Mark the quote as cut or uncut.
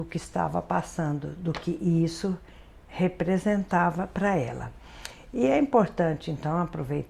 uncut